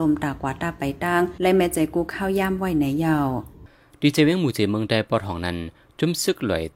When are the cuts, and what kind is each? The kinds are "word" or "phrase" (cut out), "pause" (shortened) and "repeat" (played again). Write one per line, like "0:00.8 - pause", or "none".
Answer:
none